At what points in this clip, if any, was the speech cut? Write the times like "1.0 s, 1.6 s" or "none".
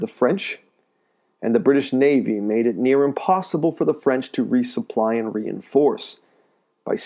none